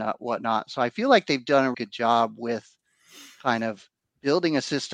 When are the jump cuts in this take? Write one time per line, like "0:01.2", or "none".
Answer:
0:01.7
0:04.0